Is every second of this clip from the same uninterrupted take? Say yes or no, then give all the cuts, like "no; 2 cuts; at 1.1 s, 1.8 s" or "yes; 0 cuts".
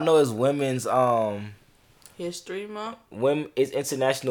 yes; 0 cuts